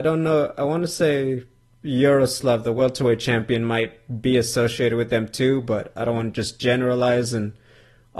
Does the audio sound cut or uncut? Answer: uncut